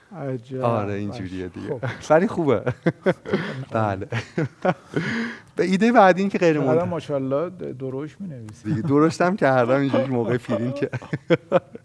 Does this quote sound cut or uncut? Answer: cut